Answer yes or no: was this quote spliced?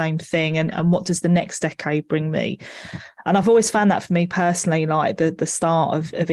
no